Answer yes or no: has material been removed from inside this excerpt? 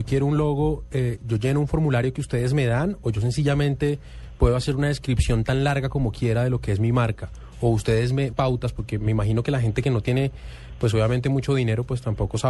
yes